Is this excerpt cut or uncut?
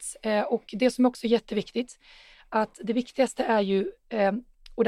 uncut